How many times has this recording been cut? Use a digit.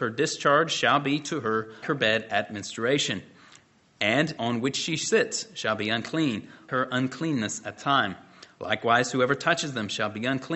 4